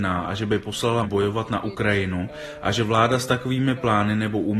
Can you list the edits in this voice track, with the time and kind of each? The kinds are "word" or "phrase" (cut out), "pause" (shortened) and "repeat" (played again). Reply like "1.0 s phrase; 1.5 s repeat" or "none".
1.0 s word